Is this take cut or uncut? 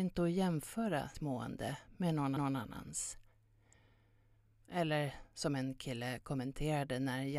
cut